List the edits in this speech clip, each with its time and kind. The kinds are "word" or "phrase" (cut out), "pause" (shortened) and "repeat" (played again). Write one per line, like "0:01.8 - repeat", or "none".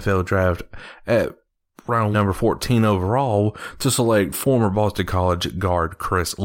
0:02.1 - word